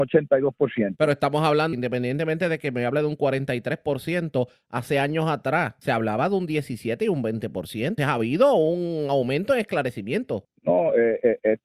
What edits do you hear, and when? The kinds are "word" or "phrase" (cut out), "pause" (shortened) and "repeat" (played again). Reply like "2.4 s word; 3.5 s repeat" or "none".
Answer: 1.7 s word; 8.0 s word